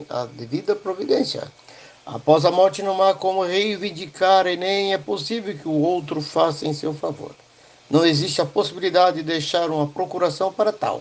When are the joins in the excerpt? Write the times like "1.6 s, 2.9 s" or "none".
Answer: none